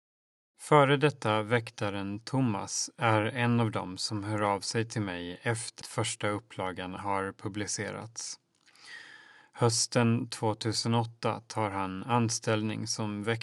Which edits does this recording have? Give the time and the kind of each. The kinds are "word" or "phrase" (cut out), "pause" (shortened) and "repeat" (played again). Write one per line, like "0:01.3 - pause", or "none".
0:05.8 - word
0:07.0 - phrase